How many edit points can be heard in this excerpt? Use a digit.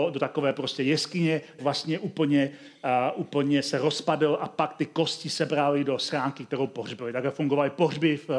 1